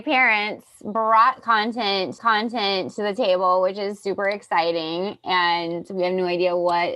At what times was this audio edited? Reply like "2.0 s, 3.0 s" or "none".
2.2 s